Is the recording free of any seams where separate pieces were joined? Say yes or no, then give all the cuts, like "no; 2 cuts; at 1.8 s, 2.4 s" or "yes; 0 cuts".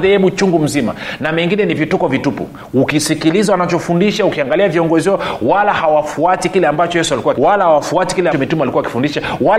no; 2 cuts; at 7.3 s, 8.3 s